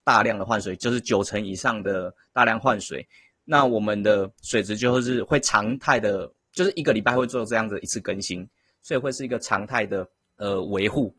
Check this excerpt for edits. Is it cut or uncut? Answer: uncut